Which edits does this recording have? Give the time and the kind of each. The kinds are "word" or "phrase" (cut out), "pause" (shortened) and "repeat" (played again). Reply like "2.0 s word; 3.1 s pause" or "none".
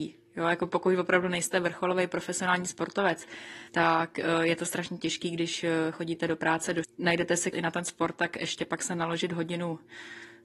3.7 s pause; 6.8 s word; 7.5 s phrase